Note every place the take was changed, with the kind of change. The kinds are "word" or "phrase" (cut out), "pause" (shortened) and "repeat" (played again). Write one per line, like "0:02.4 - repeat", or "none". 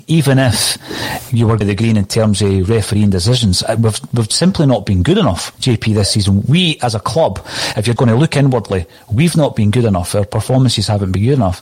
0:01.6 - phrase
0:05.5 - pause
0:08.0 - word